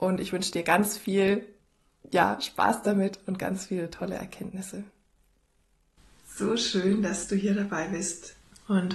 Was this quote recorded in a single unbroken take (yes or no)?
yes